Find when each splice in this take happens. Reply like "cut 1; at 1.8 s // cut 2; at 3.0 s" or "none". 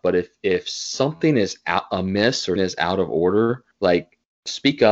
cut 1; at 2.6 s // cut 2; at 3.7 s

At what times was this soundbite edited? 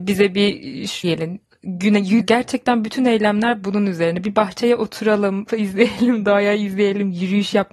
cut 1; at 1.0 s // cut 2; at 2.2 s // cut 3; at 5.5 s

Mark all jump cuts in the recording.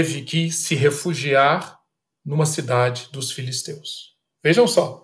cut 1; at 2.0 s

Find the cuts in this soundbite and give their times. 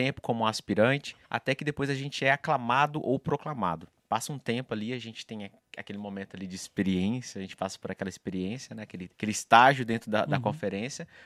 cut 1; at 1.2 s // cut 2; at 9.1 s

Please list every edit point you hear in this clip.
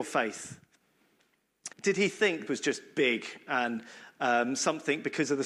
cut 1; at 1.7 s // cut 2; at 2.5 s

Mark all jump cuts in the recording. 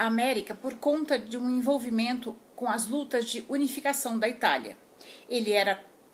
none

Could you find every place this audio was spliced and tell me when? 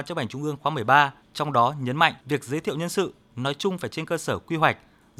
cut 1; at 1.2 s // cut 2; at 2.2 s

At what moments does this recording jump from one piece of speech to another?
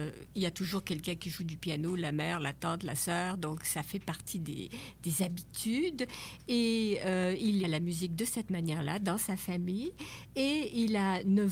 cut 1; at 7.6 s

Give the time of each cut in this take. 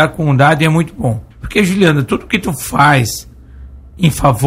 cut 1; at 1.3 s

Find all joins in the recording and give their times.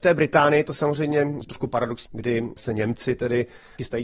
cut 1; at 1.4 s // cut 2; at 2.1 s

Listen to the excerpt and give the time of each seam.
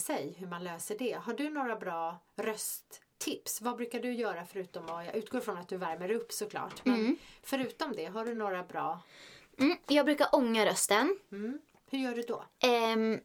none

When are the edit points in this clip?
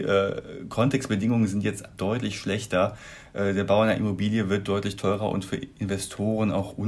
cut 1; at 1.9 s

